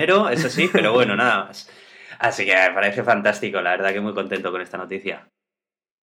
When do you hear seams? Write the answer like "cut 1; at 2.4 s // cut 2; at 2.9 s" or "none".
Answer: none